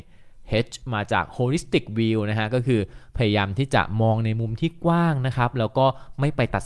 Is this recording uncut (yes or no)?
yes